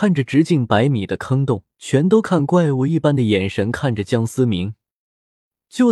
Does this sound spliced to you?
yes; 1 cut; at 1.7 s

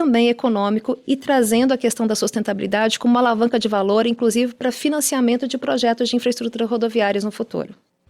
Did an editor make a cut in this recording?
no; 0 cuts

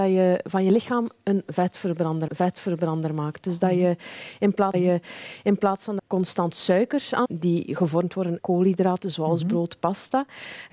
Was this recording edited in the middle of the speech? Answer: yes; 5 cuts; at 2.3 s, 4.7 s, 6.0 s, 7.2 s, 8.4 s

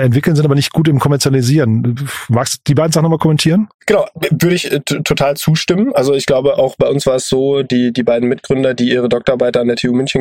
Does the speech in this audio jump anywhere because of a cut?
no; 0 cuts

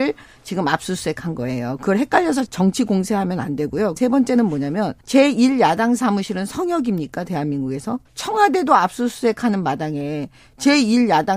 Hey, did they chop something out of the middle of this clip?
yes; 4 cuts; at 2.5 s, 4.0 s, 5.0 s, 8.1 s

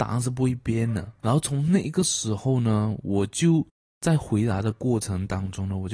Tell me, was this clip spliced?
no; 0 cuts

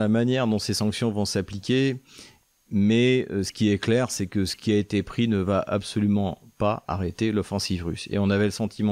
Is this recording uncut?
yes; 0 cuts

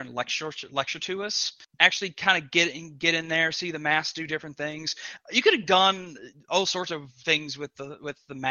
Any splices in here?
no; 0 cuts

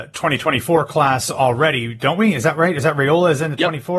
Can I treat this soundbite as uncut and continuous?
yes; 0 cuts

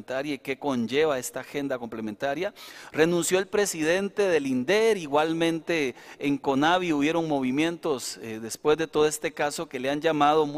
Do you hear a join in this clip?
no; 0 cuts

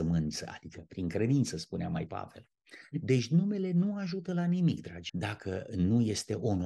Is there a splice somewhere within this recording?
yes; 2 cuts; at 2.1 s, 5.1 s

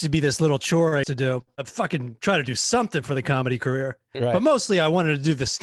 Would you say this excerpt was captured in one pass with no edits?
no; 2 cuts; at 1.0 s, 1.6 s

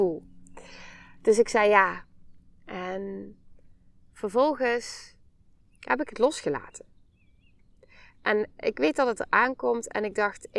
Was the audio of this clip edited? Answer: no; 0 cuts

